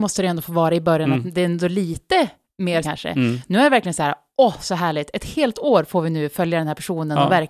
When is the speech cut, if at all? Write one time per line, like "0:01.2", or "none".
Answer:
0:02.8